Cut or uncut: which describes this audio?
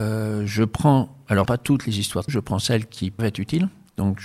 cut